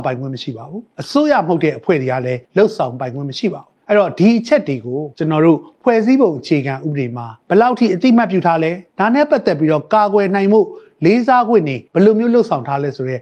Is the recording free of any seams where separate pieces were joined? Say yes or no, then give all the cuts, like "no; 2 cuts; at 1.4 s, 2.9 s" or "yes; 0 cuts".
no; 7 cuts; at 0.9 s, 2.4 s, 3.8 s, 5.1 s, 7.4 s, 8.9 s, 11.9 s